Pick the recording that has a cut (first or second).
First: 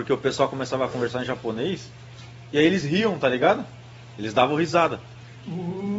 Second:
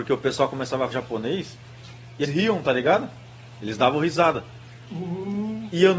second